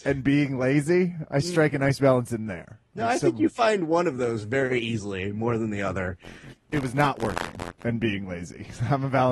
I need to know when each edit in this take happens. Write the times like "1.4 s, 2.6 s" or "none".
none